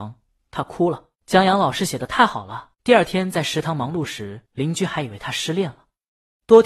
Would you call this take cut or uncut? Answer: cut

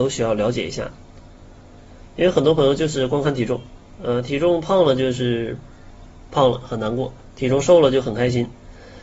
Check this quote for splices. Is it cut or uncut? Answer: uncut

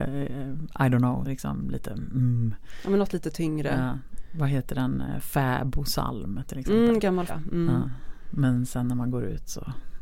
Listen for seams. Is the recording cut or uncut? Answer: cut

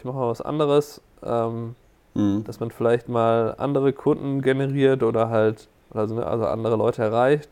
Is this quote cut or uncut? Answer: uncut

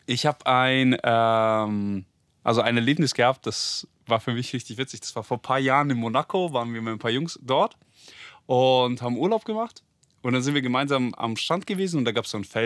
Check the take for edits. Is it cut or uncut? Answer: uncut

